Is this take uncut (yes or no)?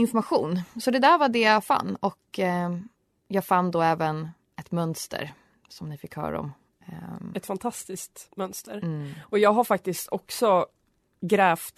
yes